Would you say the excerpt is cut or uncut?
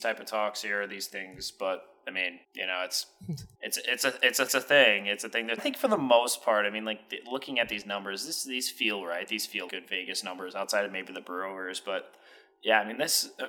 cut